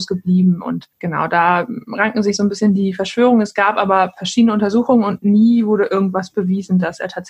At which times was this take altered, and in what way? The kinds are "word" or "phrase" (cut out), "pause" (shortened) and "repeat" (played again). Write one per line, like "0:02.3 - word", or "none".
0:00.9 - pause